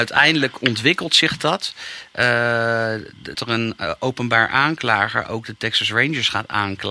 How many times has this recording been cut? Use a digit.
1